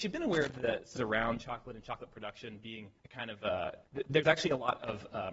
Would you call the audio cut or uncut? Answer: cut